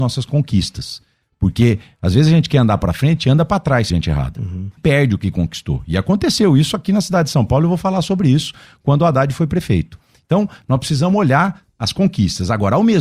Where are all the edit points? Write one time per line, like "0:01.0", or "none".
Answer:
0:03.9
0:04.8